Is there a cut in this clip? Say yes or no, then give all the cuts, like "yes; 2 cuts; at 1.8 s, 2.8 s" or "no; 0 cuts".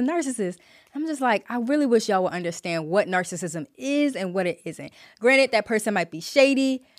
no; 0 cuts